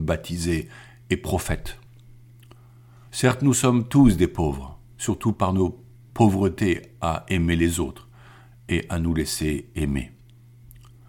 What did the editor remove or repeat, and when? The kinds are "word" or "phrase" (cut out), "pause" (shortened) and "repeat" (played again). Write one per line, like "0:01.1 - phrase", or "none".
none